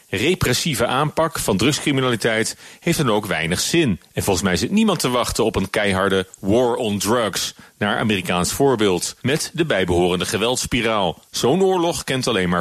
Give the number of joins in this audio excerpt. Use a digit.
3